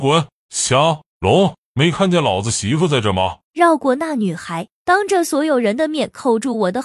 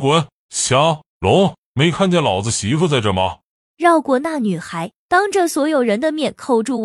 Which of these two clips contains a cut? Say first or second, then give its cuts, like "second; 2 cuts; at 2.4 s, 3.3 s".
first; 1 cut; at 3.4 s